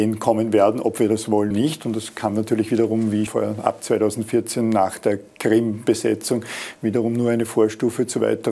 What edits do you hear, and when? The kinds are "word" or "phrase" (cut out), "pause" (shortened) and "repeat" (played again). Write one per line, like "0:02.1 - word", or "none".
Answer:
0:01.5 - word
0:03.3 - word